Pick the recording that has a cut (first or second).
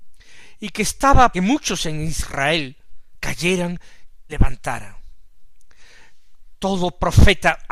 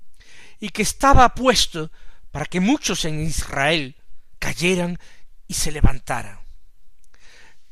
first